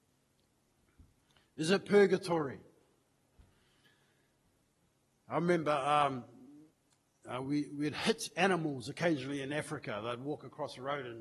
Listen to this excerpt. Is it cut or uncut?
uncut